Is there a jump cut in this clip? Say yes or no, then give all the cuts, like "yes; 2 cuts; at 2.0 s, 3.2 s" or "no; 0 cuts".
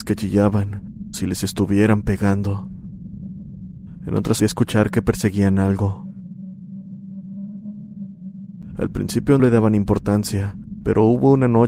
yes; 3 cuts; at 1.1 s, 4.4 s, 9.4 s